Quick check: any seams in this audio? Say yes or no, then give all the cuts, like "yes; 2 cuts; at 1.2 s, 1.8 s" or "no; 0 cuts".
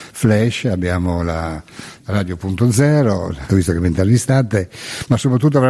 yes; 2 cuts; at 2.0 s, 3.5 s